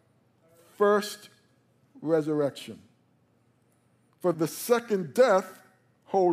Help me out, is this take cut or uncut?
cut